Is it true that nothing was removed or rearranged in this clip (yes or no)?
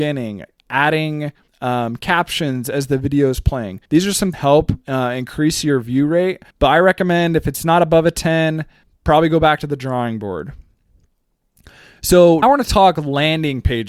no